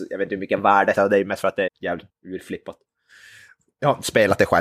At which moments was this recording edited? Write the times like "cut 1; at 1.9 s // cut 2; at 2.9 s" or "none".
cut 1; at 0.9 s // cut 2; at 1.7 s // cut 3; at 2.1 s